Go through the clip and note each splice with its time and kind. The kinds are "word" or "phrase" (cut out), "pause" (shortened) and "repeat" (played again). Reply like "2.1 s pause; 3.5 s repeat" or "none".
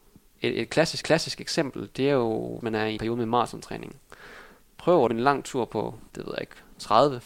1.0 s repeat; 2.6 s word; 3.0 s phrase; 5.1 s phrase; 6.1 s pause